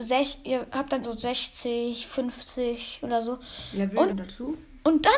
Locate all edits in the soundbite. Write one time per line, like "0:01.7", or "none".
0:01.0
0:04.1